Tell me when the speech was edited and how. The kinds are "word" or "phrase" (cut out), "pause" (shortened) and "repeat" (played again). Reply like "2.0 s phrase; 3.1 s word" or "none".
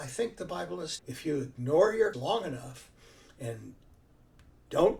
1.0 s word; 2.1 s word